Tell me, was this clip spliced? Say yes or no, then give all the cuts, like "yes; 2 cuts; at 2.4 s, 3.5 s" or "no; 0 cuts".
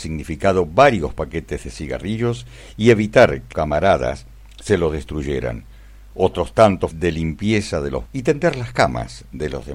yes; 3 cuts; at 3.5 s, 6.9 s, 8.1 s